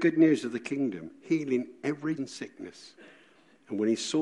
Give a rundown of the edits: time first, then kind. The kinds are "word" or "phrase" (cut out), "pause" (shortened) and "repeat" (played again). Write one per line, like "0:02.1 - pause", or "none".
0:02.2 - word